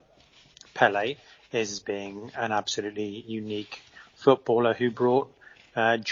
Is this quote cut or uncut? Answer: uncut